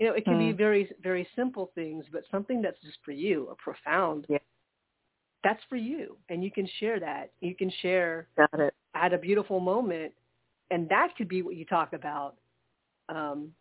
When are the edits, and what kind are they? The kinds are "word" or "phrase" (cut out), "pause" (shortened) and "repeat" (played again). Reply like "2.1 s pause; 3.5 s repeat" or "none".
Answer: 3.0 s word; 6.2 s pause; 10.7 s word